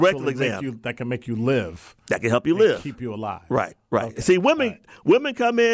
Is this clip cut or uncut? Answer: uncut